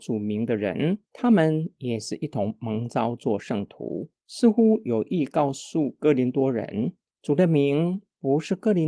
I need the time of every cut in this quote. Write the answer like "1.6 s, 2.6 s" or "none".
1.0 s, 4.2 s